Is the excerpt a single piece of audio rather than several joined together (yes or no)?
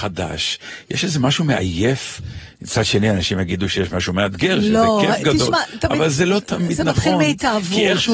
yes